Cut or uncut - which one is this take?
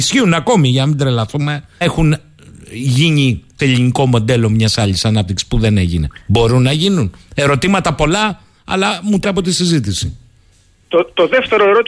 cut